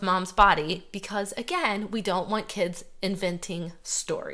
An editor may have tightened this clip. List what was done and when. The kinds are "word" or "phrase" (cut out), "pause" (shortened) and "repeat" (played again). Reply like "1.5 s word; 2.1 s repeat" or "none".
none